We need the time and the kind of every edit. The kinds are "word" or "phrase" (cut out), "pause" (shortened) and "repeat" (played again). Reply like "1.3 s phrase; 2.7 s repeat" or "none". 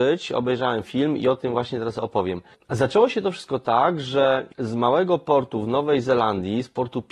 none